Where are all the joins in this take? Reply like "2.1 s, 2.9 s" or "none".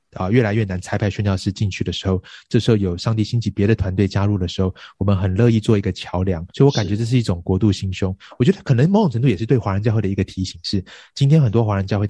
6.5 s